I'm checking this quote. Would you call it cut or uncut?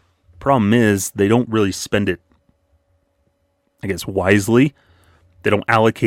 uncut